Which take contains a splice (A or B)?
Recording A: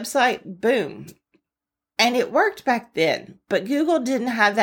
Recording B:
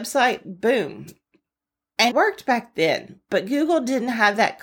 B